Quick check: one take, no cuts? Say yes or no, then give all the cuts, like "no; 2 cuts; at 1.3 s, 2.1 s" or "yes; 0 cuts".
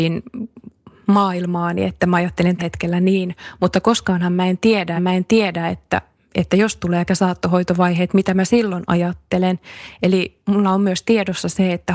no; 3 cuts; at 2.6 s, 5.0 s, 7.1 s